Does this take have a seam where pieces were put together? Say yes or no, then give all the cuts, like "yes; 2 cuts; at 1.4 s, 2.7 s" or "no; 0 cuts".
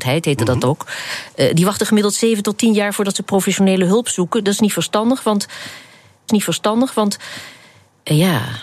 yes; 1 cut; at 6.3 s